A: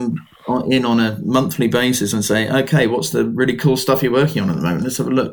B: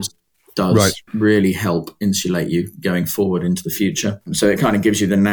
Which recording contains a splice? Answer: B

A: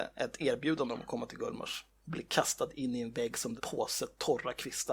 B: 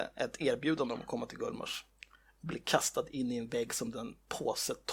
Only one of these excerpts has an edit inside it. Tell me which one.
A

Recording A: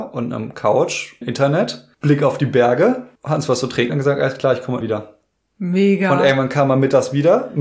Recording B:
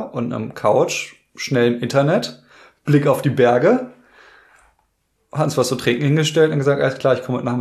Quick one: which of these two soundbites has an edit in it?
A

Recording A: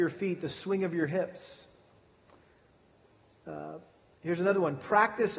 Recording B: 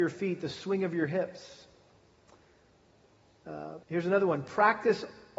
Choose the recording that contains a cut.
B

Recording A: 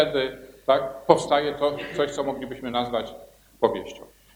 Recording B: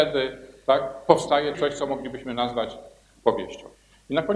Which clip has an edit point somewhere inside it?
B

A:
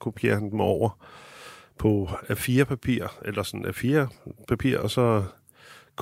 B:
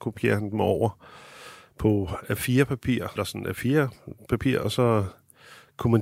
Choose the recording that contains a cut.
B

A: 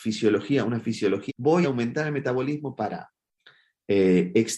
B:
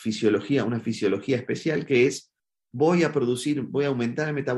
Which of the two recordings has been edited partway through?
A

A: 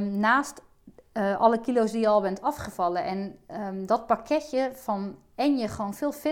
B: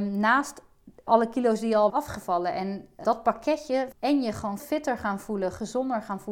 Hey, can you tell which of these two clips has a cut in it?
B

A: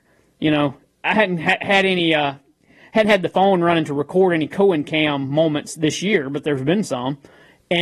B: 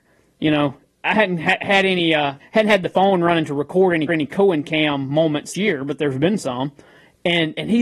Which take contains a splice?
B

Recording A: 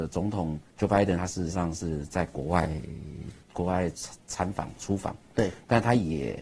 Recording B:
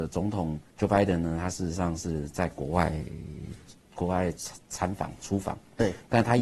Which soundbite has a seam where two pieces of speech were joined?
A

